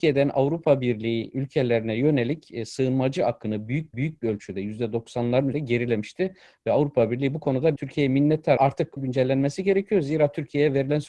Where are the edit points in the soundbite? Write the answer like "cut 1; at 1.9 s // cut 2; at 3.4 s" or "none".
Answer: cut 1; at 3.9 s // cut 2; at 5.5 s // cut 3; at 7.8 s // cut 4; at 8.6 s // cut 5; at 9.0 s